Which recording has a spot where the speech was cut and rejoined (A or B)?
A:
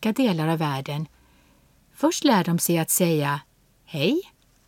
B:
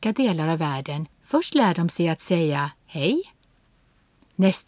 B